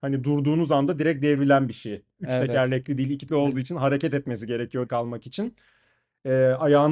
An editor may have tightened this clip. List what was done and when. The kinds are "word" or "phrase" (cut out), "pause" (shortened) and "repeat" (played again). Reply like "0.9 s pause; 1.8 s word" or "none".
3.3 s word; 4.9 s word